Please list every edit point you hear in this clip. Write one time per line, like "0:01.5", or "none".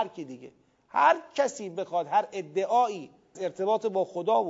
0:03.3

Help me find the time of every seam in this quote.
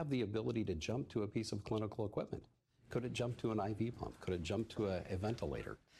none

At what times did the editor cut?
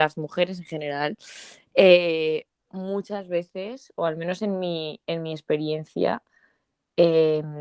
none

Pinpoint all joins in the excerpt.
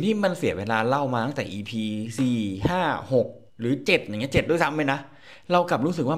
0:03.5

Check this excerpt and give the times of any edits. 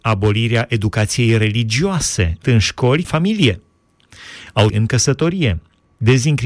0:02.4
0:03.0
0:04.7

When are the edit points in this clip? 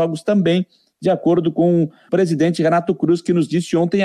0:02.1

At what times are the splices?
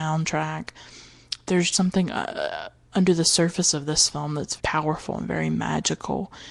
0:01.7
0:04.6

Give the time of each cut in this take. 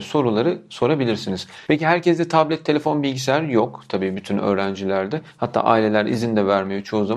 none

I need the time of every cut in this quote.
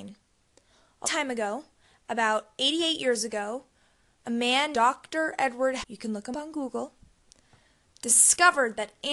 0:01.0
0:04.7
0:05.8
0:06.3

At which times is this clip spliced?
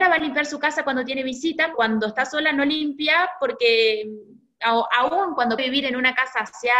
0:01.7
0:05.6

